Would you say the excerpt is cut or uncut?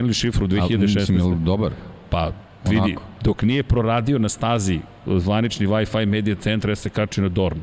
uncut